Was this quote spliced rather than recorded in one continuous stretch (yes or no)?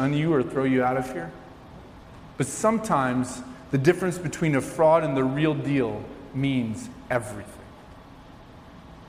no